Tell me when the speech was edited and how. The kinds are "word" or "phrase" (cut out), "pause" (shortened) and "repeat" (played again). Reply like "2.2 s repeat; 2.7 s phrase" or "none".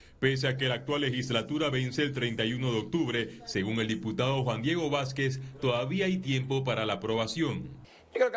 none